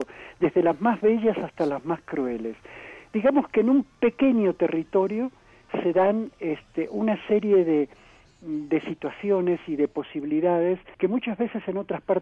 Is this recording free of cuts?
no; 1 cut; at 10.9 s

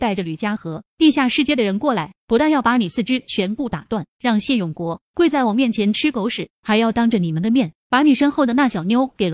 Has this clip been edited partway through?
no; 0 cuts

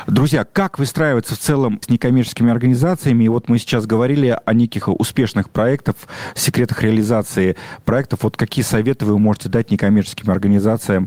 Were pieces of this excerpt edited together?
yes; 2 cuts; at 1.8 s, 4.8 s

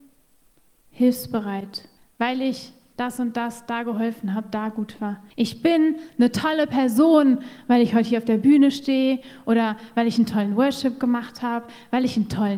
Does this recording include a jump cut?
yes; 2 cuts; at 2.0 s, 5.3 s

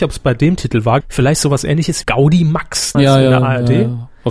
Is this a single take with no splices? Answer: no; 3 cuts; at 1.0 s, 2.0 s, 2.9 s

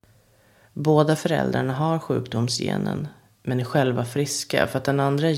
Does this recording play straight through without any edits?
yes; 0 cuts

